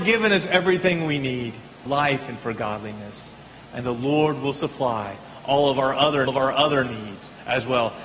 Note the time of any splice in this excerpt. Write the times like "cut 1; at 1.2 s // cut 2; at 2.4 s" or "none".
cut 1; at 1.9 s // cut 2; at 6.3 s